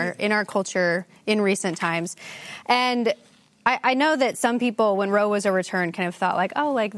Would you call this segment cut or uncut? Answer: uncut